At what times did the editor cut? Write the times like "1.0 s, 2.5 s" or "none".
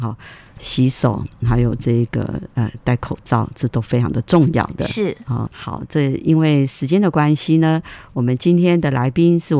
5.5 s